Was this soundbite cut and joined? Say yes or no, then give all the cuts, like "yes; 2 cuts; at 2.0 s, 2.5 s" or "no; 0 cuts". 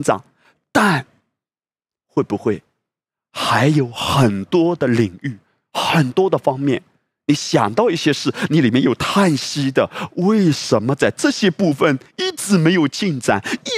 no; 0 cuts